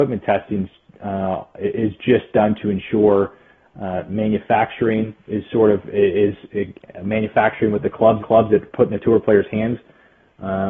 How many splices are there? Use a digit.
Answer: 1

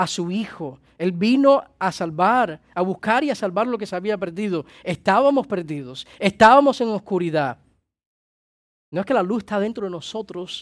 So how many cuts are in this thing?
0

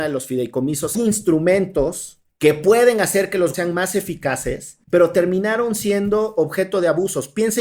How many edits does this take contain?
4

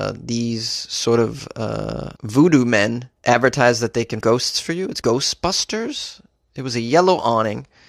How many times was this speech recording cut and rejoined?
4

